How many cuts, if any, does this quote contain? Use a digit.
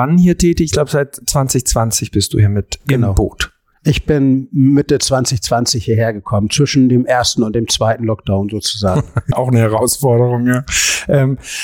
0